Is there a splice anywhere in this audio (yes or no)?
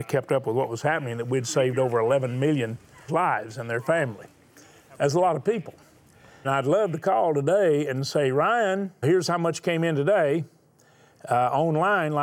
yes